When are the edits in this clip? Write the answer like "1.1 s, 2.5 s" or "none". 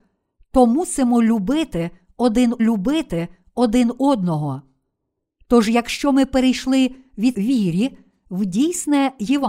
2.6 s, 7.3 s